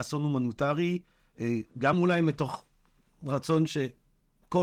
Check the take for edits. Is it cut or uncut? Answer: uncut